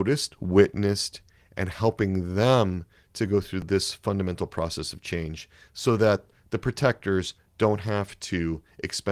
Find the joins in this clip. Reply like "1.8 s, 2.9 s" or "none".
none